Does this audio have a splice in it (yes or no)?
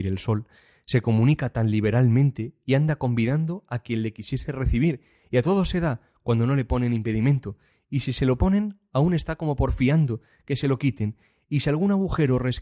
no